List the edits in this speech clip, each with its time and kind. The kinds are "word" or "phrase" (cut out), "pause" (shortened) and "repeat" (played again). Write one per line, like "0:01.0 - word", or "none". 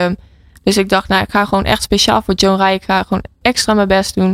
0:03.4 - word